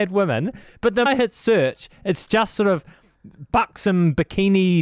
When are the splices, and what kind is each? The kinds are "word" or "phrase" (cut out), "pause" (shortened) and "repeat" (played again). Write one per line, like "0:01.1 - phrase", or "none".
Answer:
0:01.1 - word